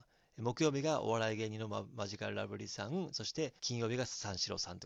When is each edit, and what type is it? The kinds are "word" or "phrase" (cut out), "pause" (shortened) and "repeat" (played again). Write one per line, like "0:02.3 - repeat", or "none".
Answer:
0:03.6 - pause

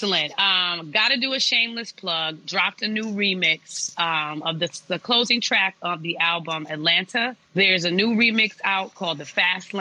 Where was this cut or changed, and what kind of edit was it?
0:07.4 - pause

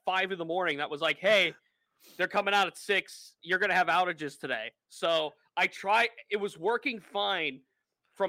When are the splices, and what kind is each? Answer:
none

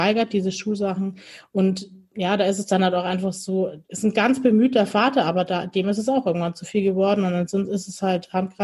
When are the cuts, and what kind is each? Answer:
0:03.8 - pause

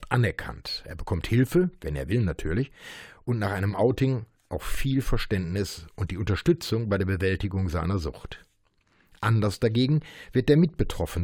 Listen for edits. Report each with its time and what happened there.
none

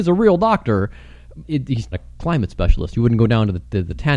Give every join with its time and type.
0:01.4 - word
0:01.9 - word

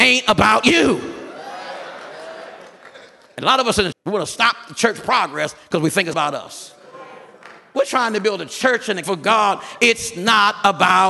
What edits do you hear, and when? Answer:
0:03.9 - word
0:06.1 - word
0:09.0 - word

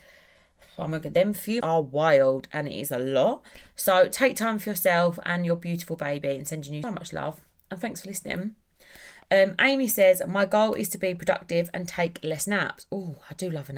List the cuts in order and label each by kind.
0:01.6 - word
0:06.8 - word

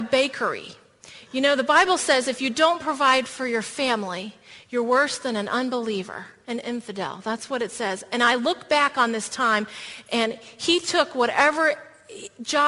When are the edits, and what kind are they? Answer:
none

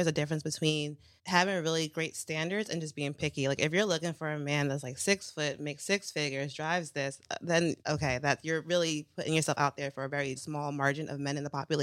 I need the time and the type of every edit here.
0:01.2 - pause
0:07.8 - pause
0:10.4 - phrase

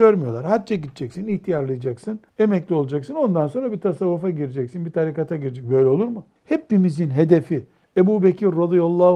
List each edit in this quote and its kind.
0:02.3 - pause
0:06.4 - pause
0:07.8 - pause

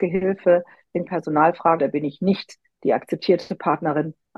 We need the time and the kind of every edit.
0:01.1 - word
0:01.8 - word

